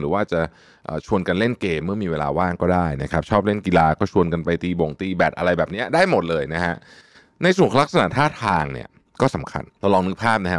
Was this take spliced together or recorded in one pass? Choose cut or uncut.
cut